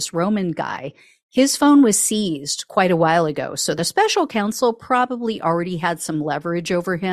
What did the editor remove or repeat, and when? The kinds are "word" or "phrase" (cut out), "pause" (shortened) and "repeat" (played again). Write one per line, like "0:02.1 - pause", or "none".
none